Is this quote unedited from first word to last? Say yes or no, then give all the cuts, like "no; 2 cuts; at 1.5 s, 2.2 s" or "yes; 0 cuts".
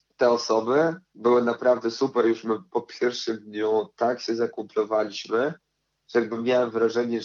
yes; 0 cuts